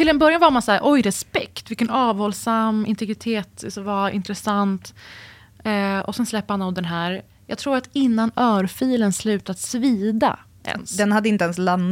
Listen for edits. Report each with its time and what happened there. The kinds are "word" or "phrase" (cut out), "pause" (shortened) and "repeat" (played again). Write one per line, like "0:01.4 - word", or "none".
none